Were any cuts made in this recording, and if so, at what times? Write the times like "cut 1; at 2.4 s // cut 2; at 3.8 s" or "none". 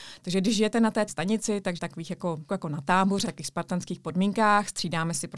cut 1; at 1.1 s // cut 2; at 1.8 s // cut 3; at 2.5 s // cut 4; at 3.2 s